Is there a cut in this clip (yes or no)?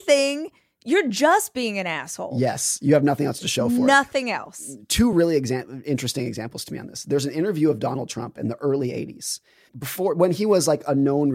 no